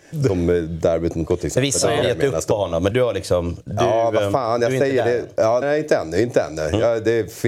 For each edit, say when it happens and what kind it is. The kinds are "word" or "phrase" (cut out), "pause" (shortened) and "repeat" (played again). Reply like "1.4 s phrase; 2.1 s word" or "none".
1.3 s word; 2.0 s word; 2.9 s word; 5.6 s word